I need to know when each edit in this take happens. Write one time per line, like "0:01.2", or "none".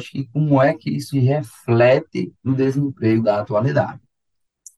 0:01.1
0:02.4
0:03.2